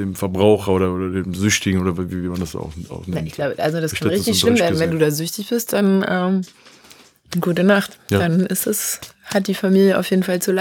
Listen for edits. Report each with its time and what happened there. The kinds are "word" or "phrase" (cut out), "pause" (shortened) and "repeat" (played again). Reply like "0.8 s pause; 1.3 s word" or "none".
none